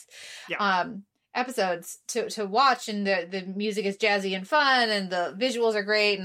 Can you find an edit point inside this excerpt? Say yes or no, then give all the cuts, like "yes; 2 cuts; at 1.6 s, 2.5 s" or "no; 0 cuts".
no; 0 cuts